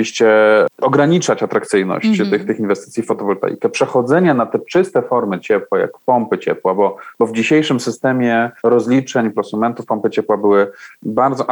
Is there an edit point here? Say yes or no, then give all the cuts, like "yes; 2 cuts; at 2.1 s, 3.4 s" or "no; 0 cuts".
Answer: yes; 1 cut; at 8.6 s